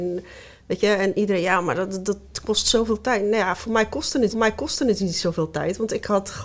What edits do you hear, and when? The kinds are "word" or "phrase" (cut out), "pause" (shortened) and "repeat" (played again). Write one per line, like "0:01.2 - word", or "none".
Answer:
0:04.3 - repeat